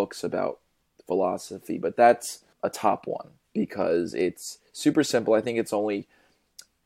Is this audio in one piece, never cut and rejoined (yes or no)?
no